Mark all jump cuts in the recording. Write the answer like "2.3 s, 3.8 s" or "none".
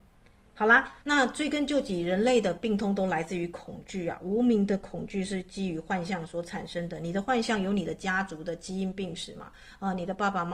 1.0 s